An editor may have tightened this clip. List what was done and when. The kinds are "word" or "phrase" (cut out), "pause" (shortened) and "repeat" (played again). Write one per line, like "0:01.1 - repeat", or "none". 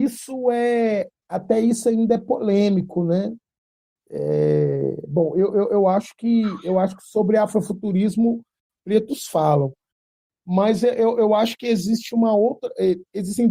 none